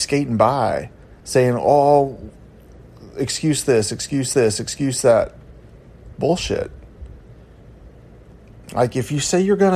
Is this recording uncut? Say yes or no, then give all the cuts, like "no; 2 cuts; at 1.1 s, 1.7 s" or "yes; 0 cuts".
no; 3 cuts; at 1.2 s, 4.3 s, 8.6 s